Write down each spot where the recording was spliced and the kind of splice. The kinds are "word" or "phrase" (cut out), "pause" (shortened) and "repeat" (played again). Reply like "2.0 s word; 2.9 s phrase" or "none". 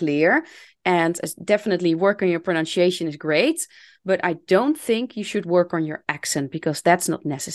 none